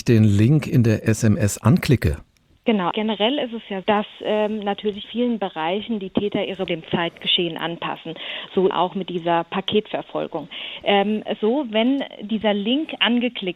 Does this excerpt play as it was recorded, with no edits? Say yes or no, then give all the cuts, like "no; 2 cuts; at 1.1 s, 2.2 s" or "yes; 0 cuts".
no; 6 cuts; at 2.9 s, 3.8 s, 5.0 s, 6.7 s, 8.7 s, 11.4 s